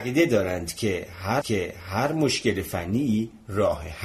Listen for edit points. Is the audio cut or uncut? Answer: cut